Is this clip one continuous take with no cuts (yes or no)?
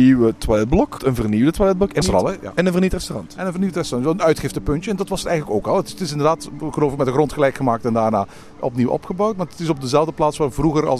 no